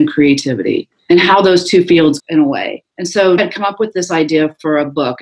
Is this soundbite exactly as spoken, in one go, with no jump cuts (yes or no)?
no